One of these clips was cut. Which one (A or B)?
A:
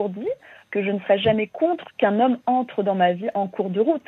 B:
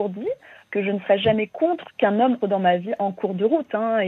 B